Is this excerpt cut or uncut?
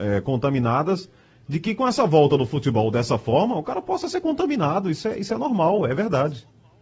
uncut